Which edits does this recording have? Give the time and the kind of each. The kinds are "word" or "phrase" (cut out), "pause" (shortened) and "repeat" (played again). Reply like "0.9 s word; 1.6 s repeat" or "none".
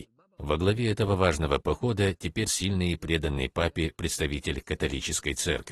2.5 s word